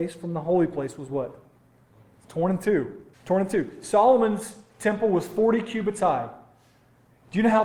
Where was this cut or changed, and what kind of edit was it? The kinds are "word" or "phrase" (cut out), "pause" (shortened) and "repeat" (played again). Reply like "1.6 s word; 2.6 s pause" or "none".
3.1 s pause

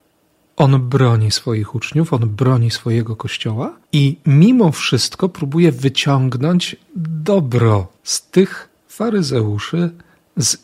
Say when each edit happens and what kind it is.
3.8 s pause; 8.0 s pause

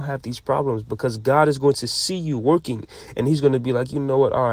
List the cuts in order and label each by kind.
none

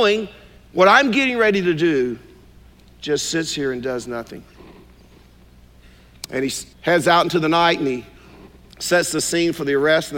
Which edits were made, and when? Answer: 2.7 s pause; 6.7 s pause; 8.6 s pause

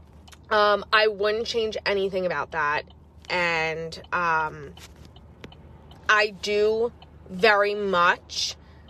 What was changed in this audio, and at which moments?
none

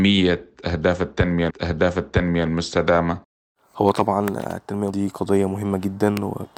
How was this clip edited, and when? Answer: 1.5 s repeat; 4.9 s word

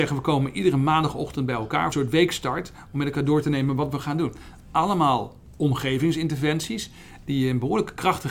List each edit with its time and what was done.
1.9 s phrase

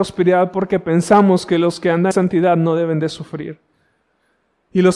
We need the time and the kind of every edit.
2.1 s word

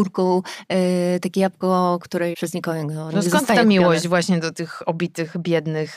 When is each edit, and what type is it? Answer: 2.3 s word

